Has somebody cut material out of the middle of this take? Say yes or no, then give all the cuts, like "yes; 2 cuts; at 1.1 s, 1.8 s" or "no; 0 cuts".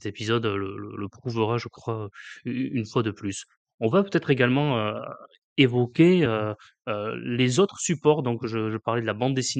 no; 0 cuts